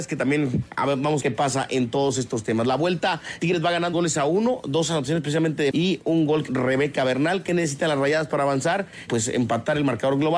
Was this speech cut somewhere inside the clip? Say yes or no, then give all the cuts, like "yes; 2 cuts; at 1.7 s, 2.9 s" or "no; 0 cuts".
yes; 6 cuts; at 1.2 s, 3.4 s, 3.9 s, 5.7 s, 6.5 s, 9.1 s